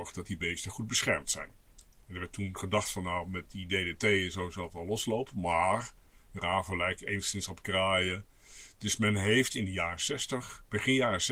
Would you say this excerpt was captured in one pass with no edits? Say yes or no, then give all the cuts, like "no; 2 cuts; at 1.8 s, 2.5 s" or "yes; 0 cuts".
yes; 0 cuts